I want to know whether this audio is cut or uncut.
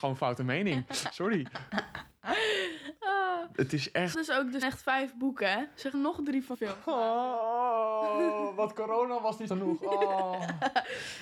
cut